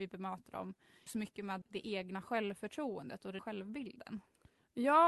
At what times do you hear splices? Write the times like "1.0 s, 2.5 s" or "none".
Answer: 1.1 s, 1.6 s, 3.4 s